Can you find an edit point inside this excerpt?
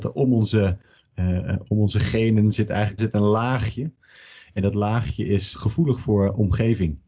yes; 2 cuts; at 3.0 s, 5.5 s

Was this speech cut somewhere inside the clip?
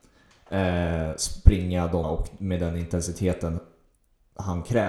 yes; 1 cut; at 2.0 s

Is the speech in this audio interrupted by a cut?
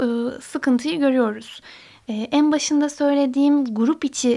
no; 0 cuts

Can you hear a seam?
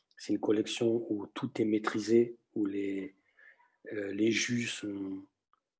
no; 0 cuts

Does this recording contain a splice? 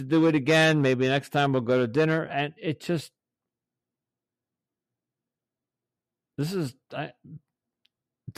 yes; 1 cut; at 2.6 s

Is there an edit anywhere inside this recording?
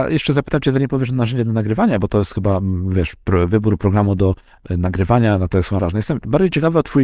yes; 1 cut; at 5.8 s

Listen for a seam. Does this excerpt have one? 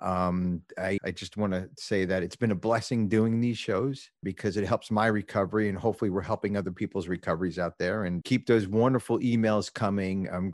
yes; 3 cuts; at 1.0 s, 4.2 s, 8.2 s

